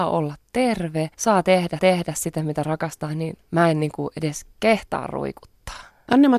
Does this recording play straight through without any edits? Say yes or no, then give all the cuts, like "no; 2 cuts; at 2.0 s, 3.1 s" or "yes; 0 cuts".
no; 3 cuts; at 1.1 s, 1.8 s, 4.5 s